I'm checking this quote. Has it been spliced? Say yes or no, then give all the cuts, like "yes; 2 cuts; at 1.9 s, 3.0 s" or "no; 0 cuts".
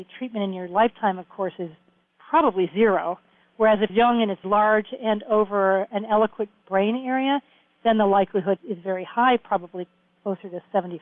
yes; 3 cuts; at 3.9 s, 4.4 s, 8.6 s